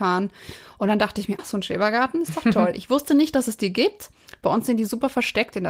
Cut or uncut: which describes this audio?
cut